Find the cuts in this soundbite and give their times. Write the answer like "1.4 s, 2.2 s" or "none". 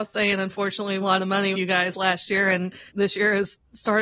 1.0 s, 1.5 s, 2.9 s